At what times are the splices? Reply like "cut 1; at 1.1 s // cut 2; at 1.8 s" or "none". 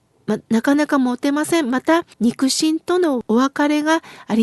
cut 1; at 2.1 s